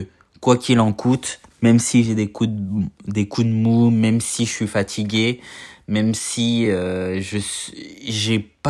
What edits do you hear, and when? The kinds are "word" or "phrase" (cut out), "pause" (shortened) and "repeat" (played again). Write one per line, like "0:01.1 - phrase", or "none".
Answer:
none